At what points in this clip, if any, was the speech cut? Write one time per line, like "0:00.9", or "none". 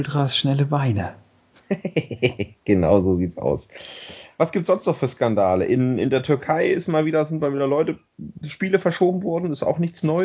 none